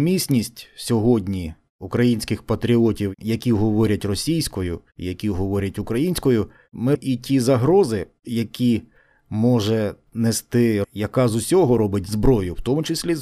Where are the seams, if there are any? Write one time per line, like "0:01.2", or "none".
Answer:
0:06.9
0:10.8